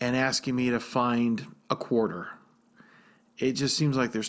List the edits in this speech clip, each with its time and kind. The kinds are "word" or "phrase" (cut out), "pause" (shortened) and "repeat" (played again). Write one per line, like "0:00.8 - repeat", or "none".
0:01.6 - pause